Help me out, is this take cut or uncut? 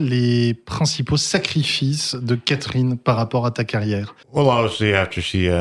cut